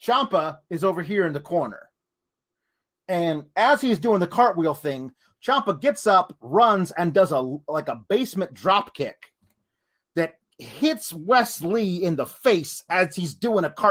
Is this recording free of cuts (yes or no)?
yes